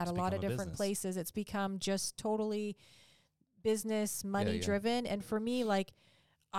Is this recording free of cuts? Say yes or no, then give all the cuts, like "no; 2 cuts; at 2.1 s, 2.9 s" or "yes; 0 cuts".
yes; 0 cuts